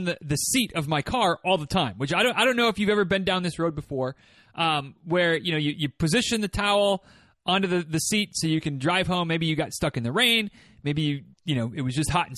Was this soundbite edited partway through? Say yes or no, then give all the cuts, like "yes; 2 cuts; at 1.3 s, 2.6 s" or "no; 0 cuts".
no; 0 cuts